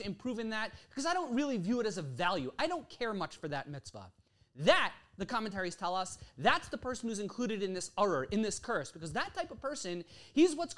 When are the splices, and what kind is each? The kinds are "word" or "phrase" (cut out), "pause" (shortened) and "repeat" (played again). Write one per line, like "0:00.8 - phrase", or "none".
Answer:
none